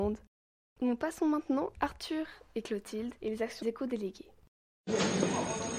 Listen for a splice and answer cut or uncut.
cut